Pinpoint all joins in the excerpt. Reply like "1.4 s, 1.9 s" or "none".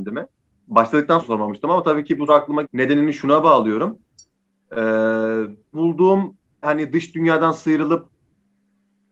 1.2 s, 2.3 s, 2.6 s, 5.7 s, 6.6 s